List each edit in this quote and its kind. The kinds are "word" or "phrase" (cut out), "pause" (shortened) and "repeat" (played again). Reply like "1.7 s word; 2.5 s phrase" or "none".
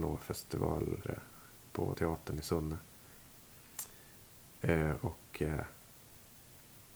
1.0 s word; 1.9 s word